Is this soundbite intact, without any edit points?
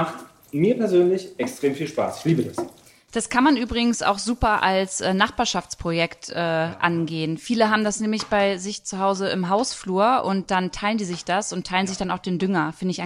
yes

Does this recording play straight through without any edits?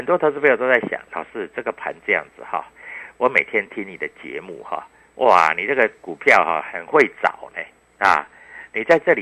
yes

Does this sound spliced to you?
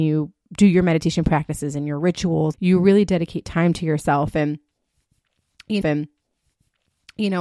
yes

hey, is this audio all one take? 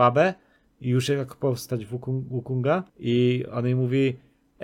no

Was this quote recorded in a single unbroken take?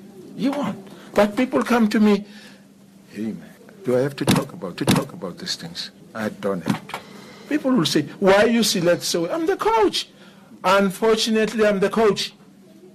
no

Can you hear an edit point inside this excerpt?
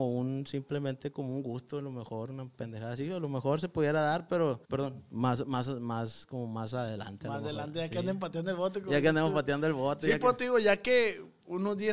yes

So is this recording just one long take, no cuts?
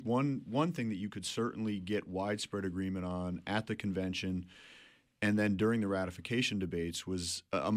yes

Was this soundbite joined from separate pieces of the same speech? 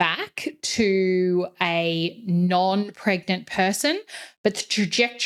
no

